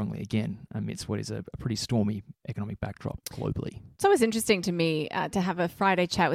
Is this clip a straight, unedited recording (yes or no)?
yes